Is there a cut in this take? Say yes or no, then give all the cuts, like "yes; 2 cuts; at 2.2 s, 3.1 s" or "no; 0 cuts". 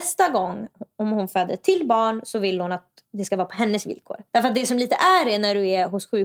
no; 0 cuts